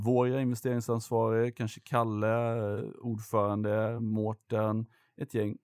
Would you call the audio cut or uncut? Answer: uncut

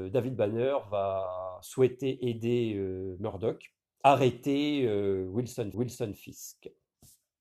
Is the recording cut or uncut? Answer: cut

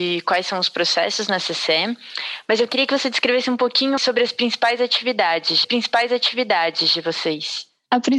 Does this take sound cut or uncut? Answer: cut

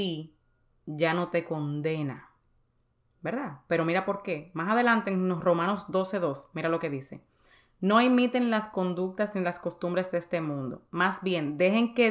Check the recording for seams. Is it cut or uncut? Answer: uncut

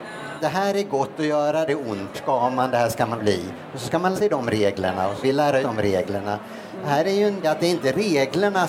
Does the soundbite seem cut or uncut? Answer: cut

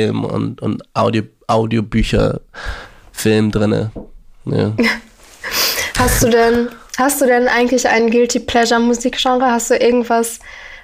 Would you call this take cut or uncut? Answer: uncut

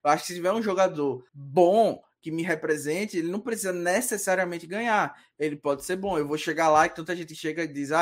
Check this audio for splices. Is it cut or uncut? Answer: cut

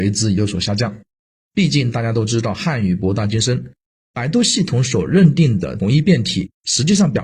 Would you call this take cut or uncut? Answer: uncut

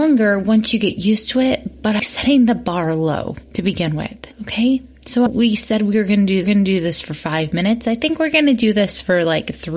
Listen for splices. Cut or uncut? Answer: cut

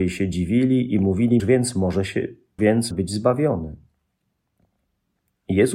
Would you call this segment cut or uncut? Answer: cut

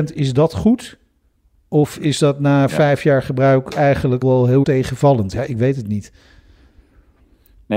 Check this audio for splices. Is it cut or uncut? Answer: cut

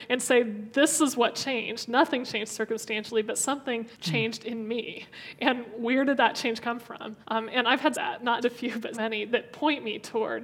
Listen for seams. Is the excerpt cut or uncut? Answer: cut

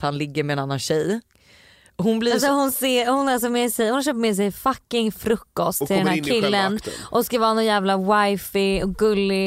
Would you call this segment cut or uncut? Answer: uncut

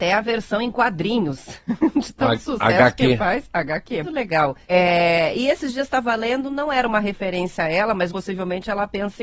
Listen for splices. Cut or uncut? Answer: cut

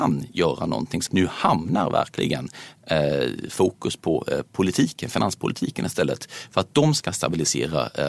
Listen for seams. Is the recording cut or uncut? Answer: cut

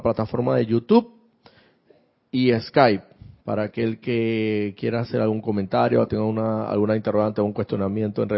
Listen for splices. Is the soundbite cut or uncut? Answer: uncut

